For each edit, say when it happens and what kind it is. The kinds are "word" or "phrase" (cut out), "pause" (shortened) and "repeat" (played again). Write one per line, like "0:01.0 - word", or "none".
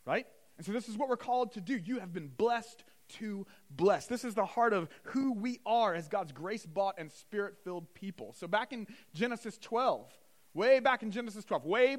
none